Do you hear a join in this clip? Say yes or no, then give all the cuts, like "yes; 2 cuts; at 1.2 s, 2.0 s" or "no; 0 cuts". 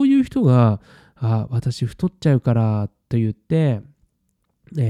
no; 0 cuts